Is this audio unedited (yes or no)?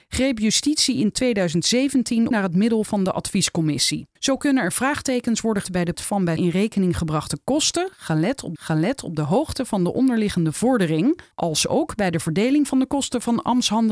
no